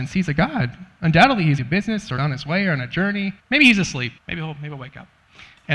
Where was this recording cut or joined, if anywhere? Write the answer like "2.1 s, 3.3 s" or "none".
1.6 s, 2.2 s, 3.4 s, 4.2 s